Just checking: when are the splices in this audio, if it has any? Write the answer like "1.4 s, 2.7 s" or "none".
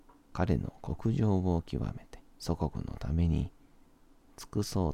2.3 s